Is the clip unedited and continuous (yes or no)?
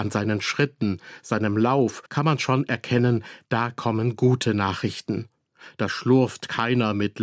no